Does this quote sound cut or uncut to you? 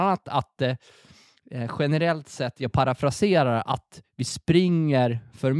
uncut